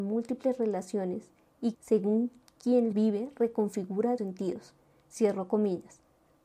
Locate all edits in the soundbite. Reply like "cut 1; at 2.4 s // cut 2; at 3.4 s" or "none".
cut 1; at 1.7 s // cut 2; at 2.9 s // cut 3; at 4.2 s